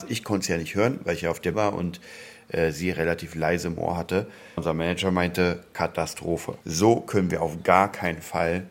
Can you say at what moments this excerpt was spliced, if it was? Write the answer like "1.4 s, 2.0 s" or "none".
1.5 s, 4.6 s, 6.6 s